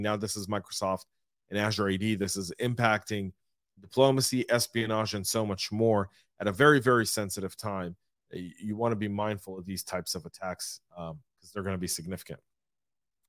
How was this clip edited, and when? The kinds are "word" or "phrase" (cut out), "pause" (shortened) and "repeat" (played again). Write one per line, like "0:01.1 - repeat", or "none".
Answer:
none